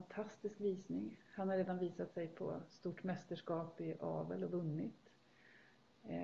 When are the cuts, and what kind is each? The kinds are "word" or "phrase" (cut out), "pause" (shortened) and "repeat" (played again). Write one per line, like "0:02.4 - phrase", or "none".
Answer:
none